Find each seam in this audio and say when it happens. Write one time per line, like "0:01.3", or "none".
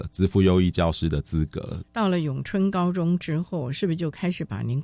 0:01.9